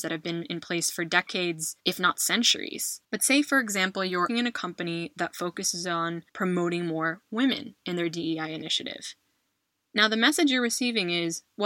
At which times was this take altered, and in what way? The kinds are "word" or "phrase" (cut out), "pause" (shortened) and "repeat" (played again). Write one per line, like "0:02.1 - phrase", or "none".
0:01.8 - pause
0:03.0 - pause
0:04.3 - phrase
0:06.3 - pause